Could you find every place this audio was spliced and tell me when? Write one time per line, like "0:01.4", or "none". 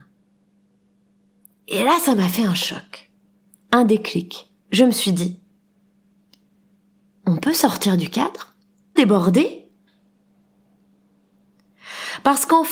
0:04.6
0:09.0